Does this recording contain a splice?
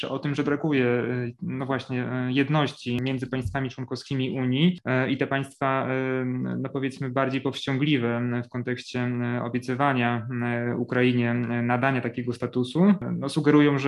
no; 0 cuts

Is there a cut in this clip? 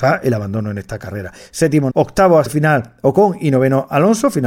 yes; 2 cuts; at 1.9 s, 2.5 s

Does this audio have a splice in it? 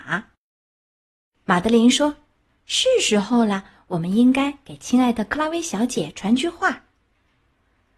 no; 0 cuts

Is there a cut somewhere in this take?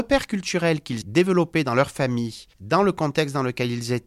yes; 2 cuts; at 1.0 s, 2.5 s

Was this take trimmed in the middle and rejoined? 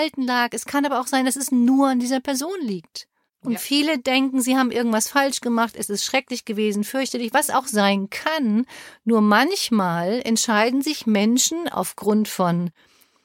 no; 0 cuts

